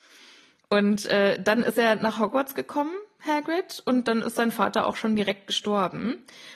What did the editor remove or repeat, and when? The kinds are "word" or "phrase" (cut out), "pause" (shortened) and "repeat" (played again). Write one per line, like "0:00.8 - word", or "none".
none